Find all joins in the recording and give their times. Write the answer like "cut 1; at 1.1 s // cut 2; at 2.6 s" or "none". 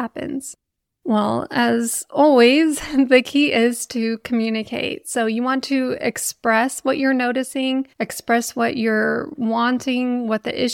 cut 1; at 7.9 s